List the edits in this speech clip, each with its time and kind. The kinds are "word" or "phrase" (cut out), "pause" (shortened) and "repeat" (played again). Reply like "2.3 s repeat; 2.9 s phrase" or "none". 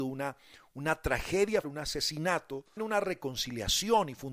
1.6 s word; 2.8 s word